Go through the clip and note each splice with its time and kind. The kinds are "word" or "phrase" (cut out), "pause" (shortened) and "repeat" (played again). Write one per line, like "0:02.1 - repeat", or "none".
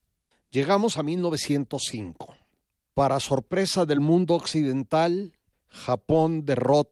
none